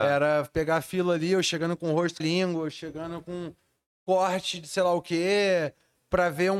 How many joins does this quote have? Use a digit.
1